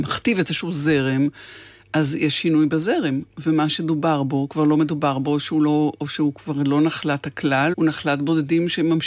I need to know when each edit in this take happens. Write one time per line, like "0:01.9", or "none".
0:07.7